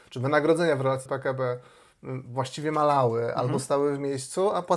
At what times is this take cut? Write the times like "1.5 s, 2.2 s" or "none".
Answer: 1.1 s